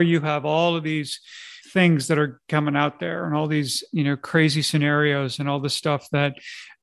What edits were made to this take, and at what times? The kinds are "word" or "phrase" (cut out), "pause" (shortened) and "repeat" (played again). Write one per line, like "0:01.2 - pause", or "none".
0:01.6 - pause